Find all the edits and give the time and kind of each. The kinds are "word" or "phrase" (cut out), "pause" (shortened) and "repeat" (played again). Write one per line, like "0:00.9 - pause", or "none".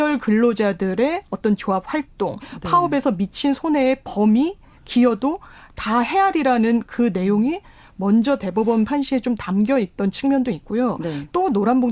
none